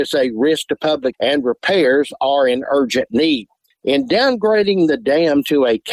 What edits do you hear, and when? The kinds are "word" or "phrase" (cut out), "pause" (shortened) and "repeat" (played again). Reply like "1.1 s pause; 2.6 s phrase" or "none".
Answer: 1.1 s word